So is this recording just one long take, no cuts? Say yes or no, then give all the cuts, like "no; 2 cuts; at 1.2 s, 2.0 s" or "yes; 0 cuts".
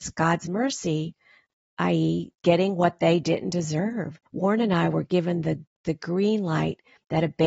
no; 2 cuts; at 2.4 s, 4.3 s